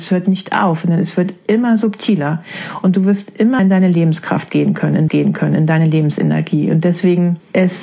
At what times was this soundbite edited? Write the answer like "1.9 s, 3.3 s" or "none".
3.6 s, 5.1 s

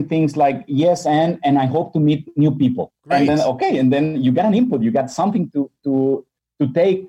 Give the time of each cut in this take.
3.0 s

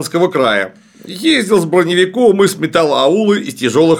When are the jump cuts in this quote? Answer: none

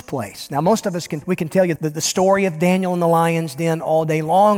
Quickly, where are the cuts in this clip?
1.2 s, 1.8 s

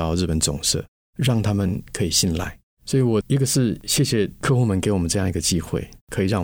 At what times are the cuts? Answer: none

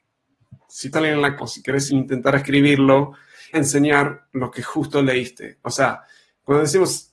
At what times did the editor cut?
0.9 s, 1.4 s, 1.9 s, 3.5 s

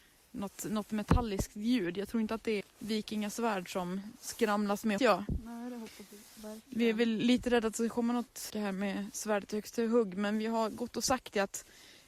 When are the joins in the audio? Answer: 2.6 s, 5.0 s, 8.5 s

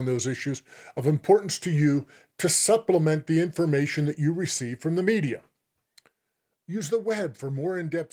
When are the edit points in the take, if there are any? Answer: none

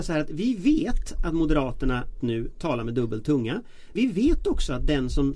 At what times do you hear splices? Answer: 2.2 s, 4.0 s

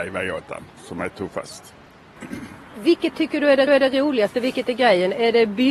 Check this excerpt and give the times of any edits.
3.7 s

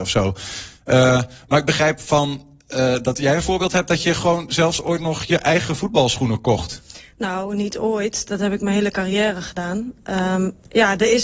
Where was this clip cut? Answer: none

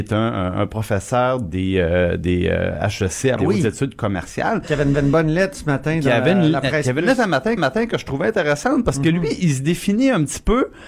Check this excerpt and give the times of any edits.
3.4 s, 4.9 s, 7.6 s

